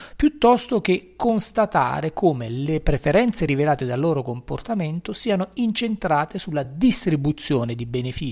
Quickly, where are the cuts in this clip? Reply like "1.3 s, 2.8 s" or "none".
none